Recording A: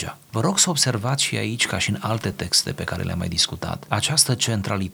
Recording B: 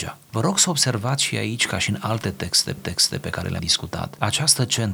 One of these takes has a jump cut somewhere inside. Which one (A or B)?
B